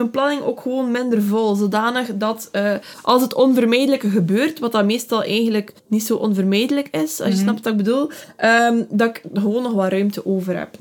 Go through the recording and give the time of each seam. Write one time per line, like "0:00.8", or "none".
0:05.8

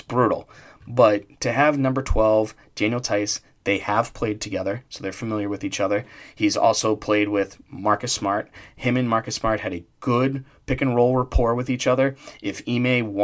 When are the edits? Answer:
none

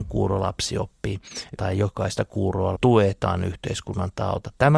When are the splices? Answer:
0:01.6
0:02.8

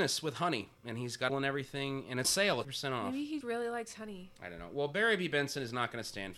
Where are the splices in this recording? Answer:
0:01.3
0:02.2
0:02.6
0:03.4

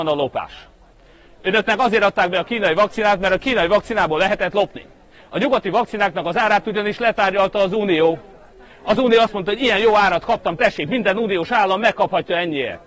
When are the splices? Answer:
none

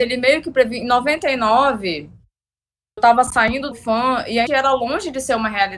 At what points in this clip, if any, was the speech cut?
0:03.0
0:03.7
0:04.5

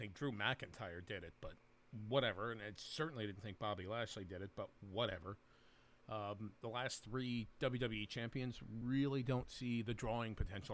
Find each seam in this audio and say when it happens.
none

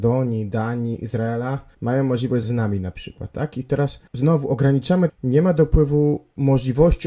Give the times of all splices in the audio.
0:01.7
0:02.4
0:04.1
0:05.1

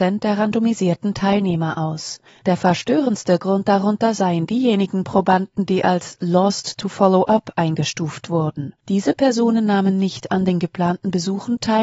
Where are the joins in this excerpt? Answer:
0:02.3
0:08.8

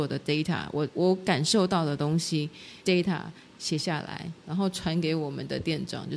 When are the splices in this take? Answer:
0:02.8

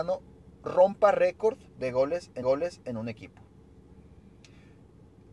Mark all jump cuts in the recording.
0:01.7
0:02.4

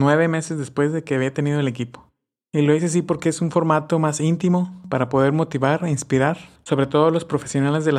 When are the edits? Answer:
none

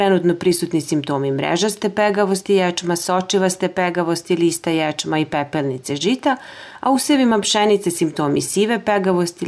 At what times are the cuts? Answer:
none

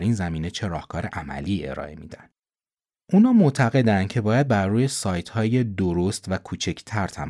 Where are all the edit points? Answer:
none

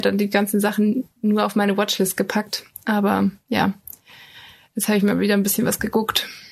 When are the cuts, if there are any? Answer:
none

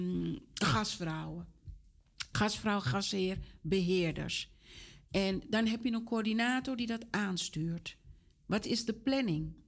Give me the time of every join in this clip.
none

